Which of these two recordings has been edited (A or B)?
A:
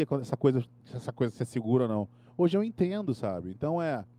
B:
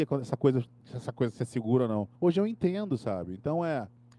B